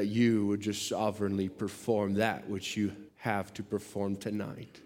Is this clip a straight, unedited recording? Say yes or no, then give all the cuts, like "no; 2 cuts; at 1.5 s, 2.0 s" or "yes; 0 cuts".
no; 1 cut; at 3.1 s